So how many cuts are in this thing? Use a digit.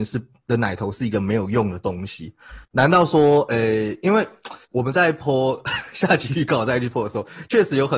2